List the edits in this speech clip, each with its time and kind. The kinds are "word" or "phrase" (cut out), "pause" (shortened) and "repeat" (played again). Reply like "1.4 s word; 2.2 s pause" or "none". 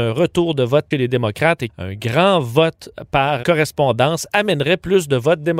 0.9 s phrase; 1.7 s word; 3.4 s word